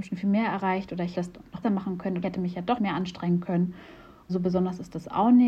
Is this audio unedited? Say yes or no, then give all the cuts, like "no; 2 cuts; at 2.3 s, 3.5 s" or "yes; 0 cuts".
no; 5 cuts; at 1.1 s, 1.6 s, 2.2 s, 2.8 s, 4.3 s